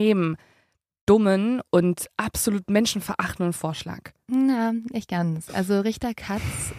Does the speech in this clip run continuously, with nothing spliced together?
yes; 0 cuts

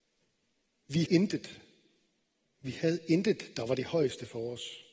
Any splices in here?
yes; 1 cut; at 1.1 s

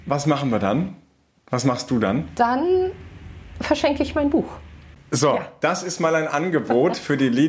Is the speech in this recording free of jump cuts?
yes; 0 cuts

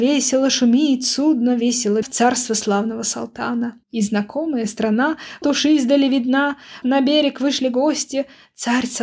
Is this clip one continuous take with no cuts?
no; 4 cuts; at 2.0 s, 3.8 s, 5.4 s, 6.8 s

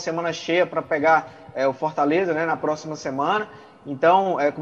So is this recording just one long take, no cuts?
yes; 0 cuts

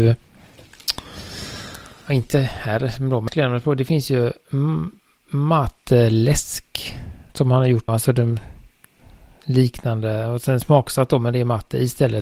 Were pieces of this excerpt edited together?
yes; 4 cuts; at 2.1 s, 3.3 s, 7.3 s, 7.9 s

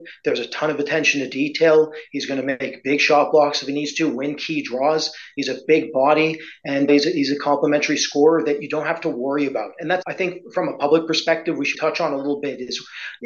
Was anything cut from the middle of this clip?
yes; 3 cuts; at 6.9 s, 10.0 s, 11.7 s

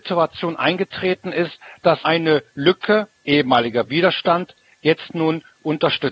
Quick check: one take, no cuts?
no; 1 cut; at 2.0 s

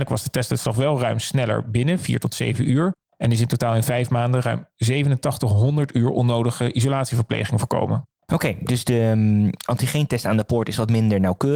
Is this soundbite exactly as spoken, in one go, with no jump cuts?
yes; 0 cuts

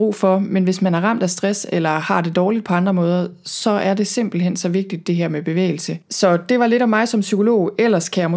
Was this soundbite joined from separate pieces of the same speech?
no; 0 cuts

